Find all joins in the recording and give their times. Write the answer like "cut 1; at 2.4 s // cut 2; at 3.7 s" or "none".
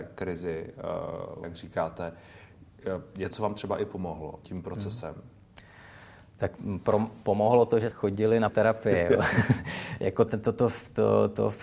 cut 1; at 1.4 s // cut 2; at 3.3 s // cut 3; at 4.4 s // cut 4; at 6.6 s // cut 5; at 7.9 s // cut 6; at 8.5 s // cut 7; at 10.3 s